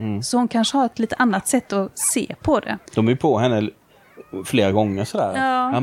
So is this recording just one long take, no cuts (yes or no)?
no